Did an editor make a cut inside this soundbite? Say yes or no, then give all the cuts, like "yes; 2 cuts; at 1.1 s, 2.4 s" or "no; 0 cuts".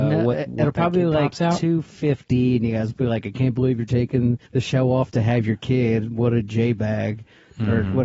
yes; 1 cut; at 4.5 s